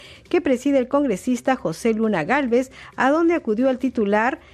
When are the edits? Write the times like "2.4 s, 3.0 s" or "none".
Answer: none